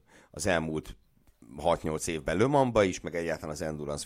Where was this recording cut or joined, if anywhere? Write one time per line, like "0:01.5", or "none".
none